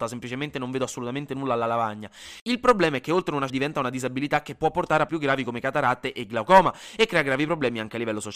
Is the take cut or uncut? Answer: cut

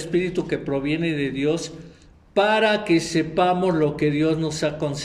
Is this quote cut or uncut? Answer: uncut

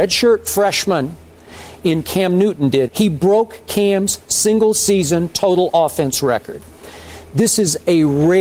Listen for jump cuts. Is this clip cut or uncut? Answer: cut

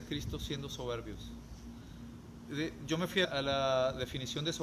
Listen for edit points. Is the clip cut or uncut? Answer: cut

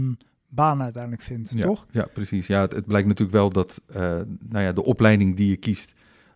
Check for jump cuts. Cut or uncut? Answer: uncut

